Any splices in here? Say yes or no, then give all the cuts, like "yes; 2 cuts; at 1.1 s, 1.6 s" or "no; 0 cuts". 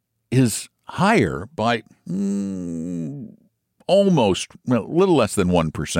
yes; 1 cut; at 4.5 s